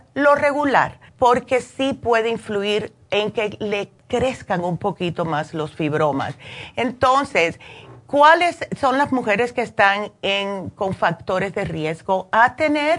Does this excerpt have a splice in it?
yes; 2 cuts; at 1.1 s, 4.0 s

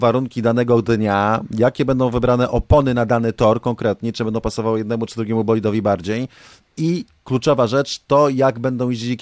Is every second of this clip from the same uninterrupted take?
yes; 0 cuts

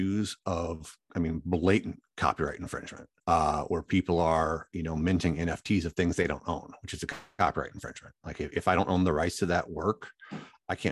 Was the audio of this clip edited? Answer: yes; 1 cut; at 3.2 s

